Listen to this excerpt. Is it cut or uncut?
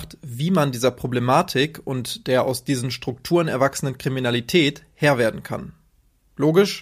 uncut